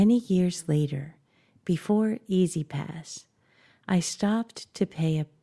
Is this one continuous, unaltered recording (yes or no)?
yes